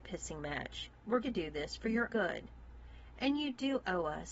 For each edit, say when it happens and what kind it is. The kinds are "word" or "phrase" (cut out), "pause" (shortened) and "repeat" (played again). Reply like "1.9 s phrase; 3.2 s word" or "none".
1.2 s word; 2.1 s word